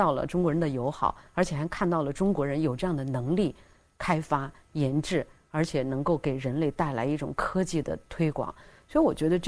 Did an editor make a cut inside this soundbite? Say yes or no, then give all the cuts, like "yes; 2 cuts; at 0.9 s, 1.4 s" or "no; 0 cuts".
no; 0 cuts